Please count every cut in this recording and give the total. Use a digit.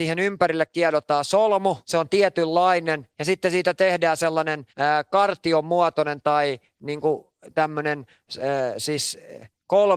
3